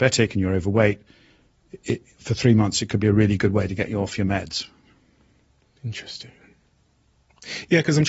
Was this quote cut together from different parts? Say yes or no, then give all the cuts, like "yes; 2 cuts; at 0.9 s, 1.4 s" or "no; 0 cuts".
no; 0 cuts